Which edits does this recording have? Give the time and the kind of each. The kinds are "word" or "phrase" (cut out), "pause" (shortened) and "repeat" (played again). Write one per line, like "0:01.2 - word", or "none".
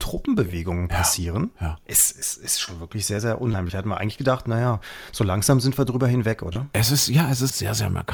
none